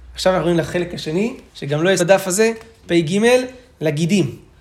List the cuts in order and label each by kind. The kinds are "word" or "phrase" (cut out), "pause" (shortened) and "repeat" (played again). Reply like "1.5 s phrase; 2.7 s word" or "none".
1.5 s pause; 2.0 s word